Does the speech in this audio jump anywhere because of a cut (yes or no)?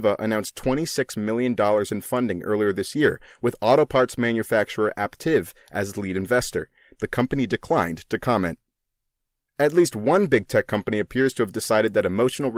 no